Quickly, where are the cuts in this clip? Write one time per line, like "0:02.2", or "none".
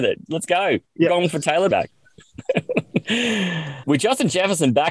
0:01.7

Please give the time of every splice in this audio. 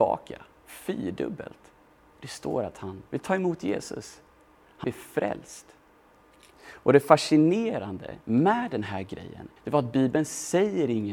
0:02.0
0:03.1
0:04.8
0:06.1
0:08.2
0:09.6

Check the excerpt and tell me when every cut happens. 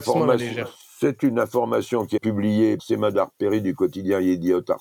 0:02.2
0:02.8

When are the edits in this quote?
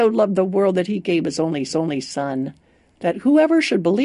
0:01.7

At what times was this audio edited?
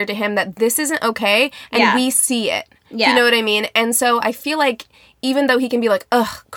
none

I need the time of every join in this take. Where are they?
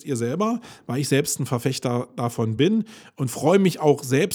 none

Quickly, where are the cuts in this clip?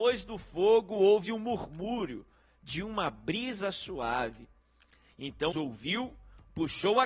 0:05.5

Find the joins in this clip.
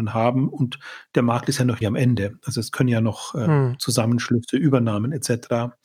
0:01.8

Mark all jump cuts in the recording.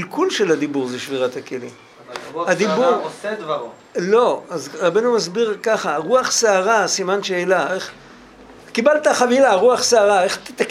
none

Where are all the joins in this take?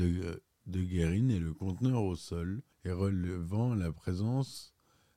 0:02.7

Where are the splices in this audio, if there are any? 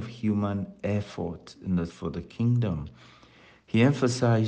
0:01.9

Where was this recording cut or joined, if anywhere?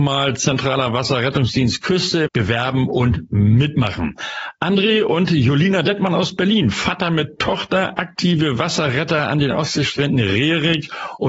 0:02.3

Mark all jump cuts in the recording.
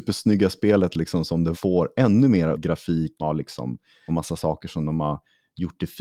0:01.5
0:02.5
0:03.2
0:04.1

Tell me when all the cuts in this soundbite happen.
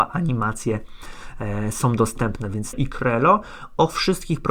0:02.7

